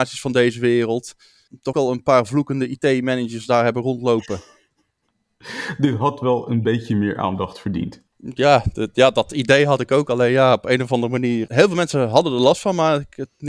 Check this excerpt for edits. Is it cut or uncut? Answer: cut